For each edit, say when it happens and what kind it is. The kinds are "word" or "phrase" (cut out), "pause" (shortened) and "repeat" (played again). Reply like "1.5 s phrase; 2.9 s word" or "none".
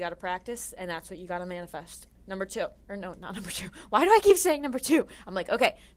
2.8 s pause